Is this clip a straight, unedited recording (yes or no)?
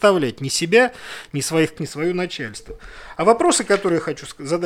no